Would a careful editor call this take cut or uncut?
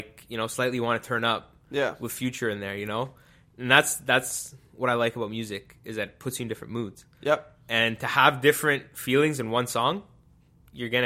uncut